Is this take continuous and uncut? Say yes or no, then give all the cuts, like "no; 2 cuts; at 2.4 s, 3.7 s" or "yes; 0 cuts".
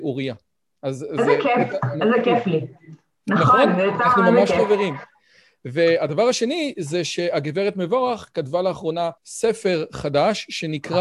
no; 1 cut; at 9.2 s